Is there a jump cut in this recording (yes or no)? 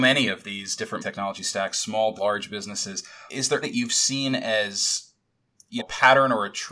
yes